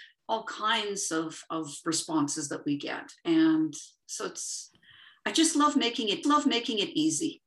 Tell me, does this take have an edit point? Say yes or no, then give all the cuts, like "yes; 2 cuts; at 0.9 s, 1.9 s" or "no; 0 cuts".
yes; 1 cut; at 6.2 s